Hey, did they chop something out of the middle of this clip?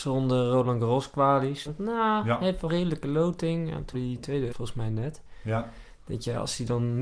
yes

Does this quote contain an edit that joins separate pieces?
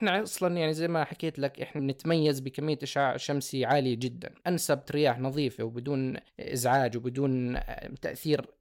yes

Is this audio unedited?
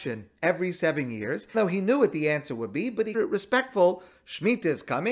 no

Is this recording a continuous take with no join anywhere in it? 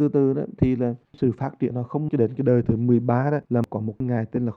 no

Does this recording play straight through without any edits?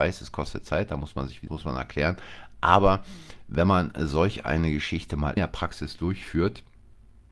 no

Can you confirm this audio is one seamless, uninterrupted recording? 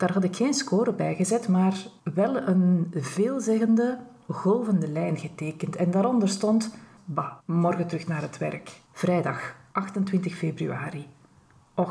no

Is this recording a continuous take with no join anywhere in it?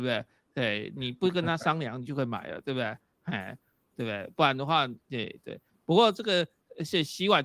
yes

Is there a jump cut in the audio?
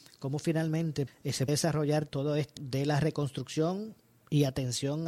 yes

